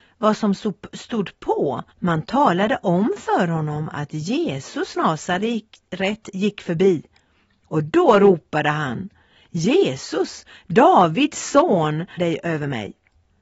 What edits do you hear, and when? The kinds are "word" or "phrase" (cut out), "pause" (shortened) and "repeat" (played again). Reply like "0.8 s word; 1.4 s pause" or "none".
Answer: 1.9 s pause; 5.0 s word; 12.2 s word